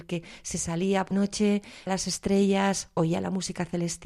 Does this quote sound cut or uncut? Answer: cut